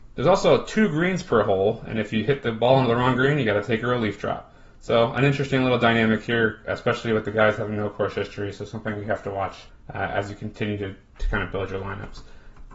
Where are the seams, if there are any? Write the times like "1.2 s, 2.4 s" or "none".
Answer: 9.7 s